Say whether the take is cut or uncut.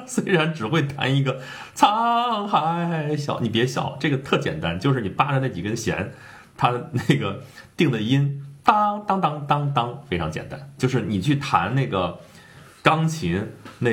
uncut